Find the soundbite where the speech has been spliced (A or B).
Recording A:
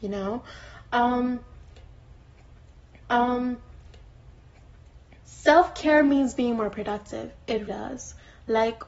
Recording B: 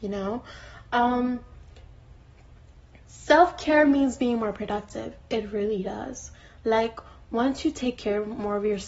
A